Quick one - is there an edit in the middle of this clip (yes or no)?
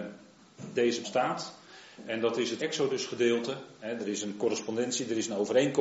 yes